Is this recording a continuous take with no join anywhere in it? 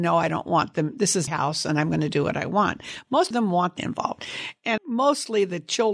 no; 4 cuts; at 1.3 s, 3.3 s, 3.8 s, 4.8 s

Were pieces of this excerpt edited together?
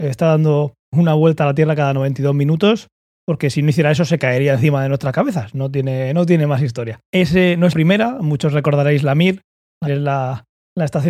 yes; 2 cuts; at 7.7 s, 9.9 s

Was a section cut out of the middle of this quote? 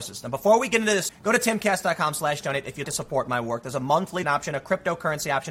yes; 3 cuts; at 1.1 s, 2.8 s, 4.2 s

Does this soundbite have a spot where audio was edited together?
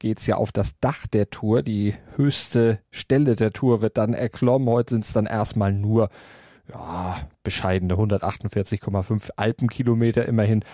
no; 0 cuts

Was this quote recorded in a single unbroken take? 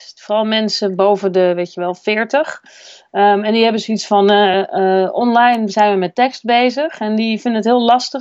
yes; 0 cuts

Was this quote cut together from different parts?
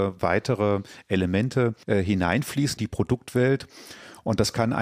yes; 1 cut; at 2.8 s

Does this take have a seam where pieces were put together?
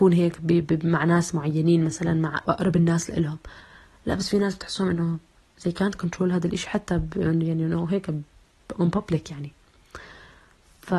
yes; 1 cut; at 2.5 s

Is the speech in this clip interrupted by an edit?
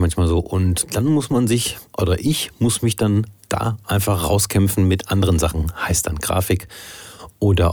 no; 0 cuts

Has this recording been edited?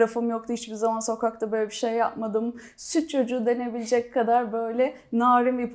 no; 0 cuts

